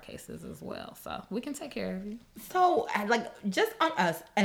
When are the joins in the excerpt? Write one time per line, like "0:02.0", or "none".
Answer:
none